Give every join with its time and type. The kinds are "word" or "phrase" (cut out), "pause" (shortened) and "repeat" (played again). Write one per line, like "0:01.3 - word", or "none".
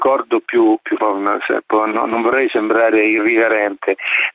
0:01.0 - word